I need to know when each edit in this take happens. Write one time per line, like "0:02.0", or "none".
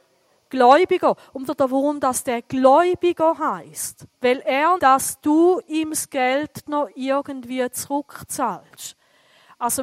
0:01.5
0:04.1
0:04.8
0:06.7